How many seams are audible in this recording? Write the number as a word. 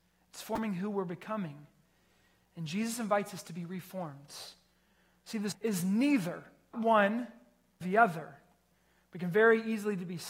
three